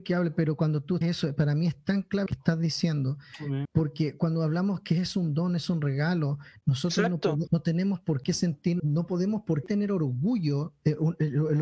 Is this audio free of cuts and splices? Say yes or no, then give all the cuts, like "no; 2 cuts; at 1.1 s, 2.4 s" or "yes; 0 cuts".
no; 6 cuts; at 1.0 s, 2.3 s, 3.6 s, 7.5 s, 8.8 s, 9.6 s